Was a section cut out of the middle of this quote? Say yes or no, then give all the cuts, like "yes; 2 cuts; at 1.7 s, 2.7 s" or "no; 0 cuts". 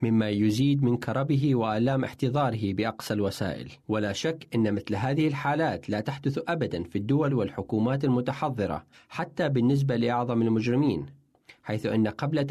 yes; 2 cuts; at 3.8 s, 8.9 s